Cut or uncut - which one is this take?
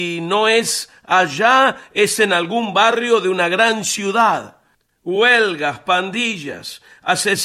uncut